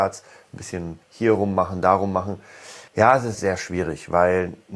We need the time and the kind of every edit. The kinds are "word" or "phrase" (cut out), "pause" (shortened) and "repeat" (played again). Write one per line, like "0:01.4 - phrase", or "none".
0:01.0 - pause
0:02.9 - pause
0:03.3 - word